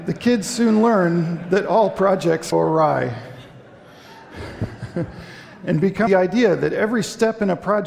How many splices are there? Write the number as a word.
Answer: two